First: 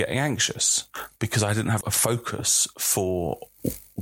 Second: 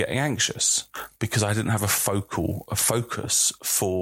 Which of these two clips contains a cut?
first; 1 cut; at 1.8 s

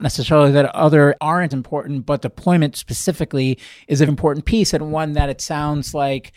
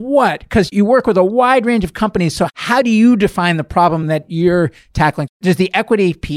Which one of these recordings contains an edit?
first; 4 cuts; at 1.2 s, 1.5 s, 2.2 s, 4.1 s

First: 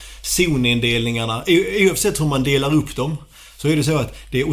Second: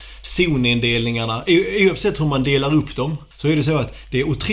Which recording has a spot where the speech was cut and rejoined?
second; 1 cut; at 3.3 s

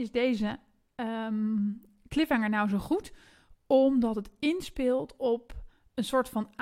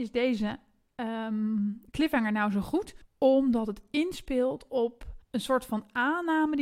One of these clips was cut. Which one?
second; 3 cuts; at 1.9 s, 3.0 s, 5.2 s

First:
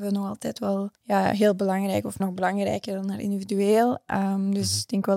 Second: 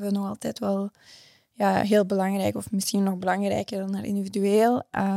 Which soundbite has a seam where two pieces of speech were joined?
first; 2 cuts; at 1.0 s, 2.2 s

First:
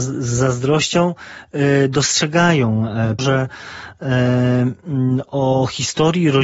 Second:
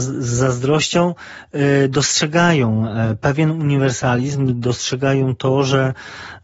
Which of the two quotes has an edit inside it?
first; 1 cut; at 3.2 s

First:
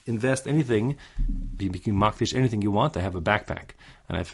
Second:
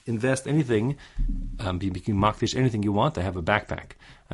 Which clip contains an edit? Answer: first; 1 cut; at 1.6 s

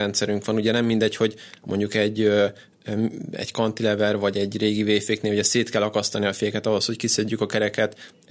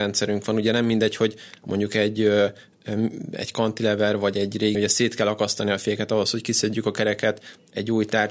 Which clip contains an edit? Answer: second; 1 cut; at 4.7 s

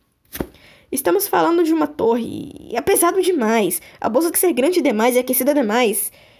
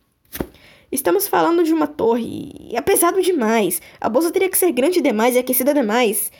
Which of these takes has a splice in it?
first; 1 cut; at 4.3 s

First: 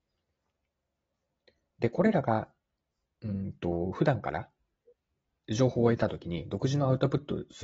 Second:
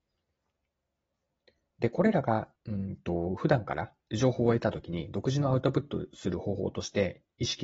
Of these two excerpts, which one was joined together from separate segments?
second; 2 cuts; at 2.5 s, 4.0 s

